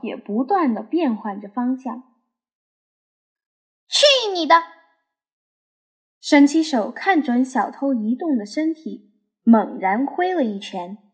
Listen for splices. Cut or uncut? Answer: uncut